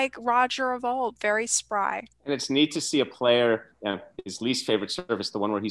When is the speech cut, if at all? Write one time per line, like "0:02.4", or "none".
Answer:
0:02.1
0:03.7